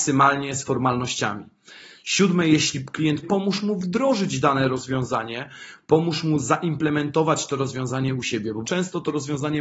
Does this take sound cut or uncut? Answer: cut